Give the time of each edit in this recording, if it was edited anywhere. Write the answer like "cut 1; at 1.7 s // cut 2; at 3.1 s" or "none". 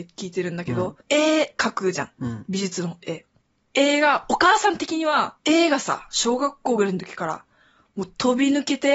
cut 1; at 1.0 s // cut 2; at 3.5 s // cut 3; at 5.4 s